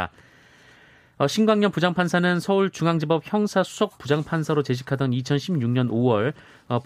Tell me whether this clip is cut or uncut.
uncut